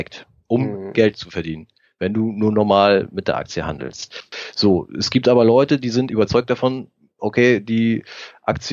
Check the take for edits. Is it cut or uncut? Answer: cut